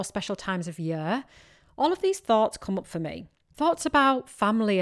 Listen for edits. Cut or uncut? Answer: uncut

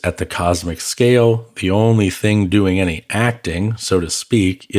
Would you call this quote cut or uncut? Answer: uncut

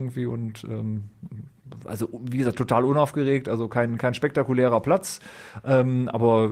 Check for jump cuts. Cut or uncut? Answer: uncut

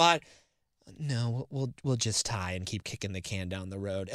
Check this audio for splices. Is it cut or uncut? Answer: uncut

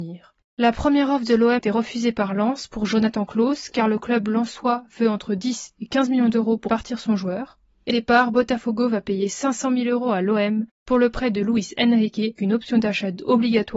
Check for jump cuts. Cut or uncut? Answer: cut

